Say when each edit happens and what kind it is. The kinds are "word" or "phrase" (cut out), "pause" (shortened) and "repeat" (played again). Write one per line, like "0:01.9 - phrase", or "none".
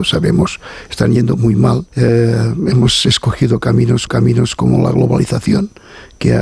0:01.9 - pause
0:04.1 - repeat